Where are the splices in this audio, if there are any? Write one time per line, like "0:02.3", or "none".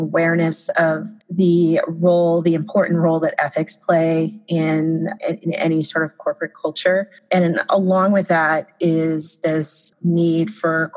0:01.2
0:05.2
0:09.9